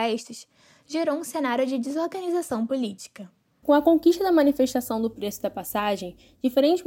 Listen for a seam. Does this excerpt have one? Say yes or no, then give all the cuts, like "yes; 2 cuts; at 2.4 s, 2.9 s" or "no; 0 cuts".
no; 0 cuts